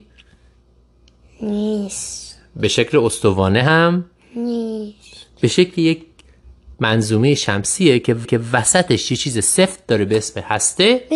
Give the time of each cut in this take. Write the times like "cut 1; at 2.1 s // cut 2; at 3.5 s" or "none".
cut 1; at 8.2 s